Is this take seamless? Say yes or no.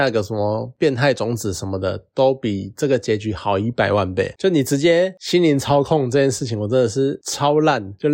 yes